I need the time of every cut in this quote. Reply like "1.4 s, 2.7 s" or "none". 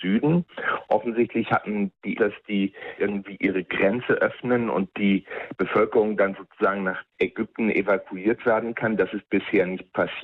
2.1 s, 3.0 s, 7.1 s